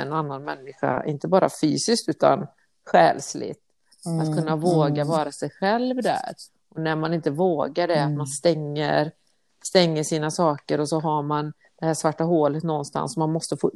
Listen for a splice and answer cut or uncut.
uncut